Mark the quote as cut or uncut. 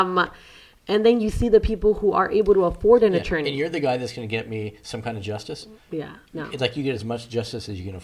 uncut